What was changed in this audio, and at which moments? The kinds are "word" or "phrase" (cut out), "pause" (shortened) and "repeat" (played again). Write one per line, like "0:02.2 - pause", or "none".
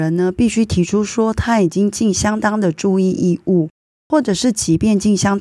none